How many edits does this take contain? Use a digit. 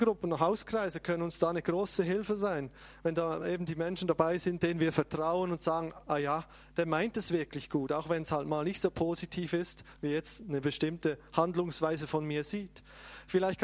0